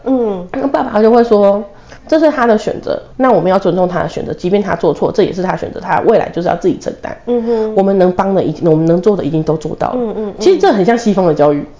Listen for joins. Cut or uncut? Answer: cut